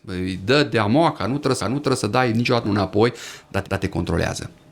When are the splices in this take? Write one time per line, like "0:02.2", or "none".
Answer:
0:01.6
0:02.6
0:03.6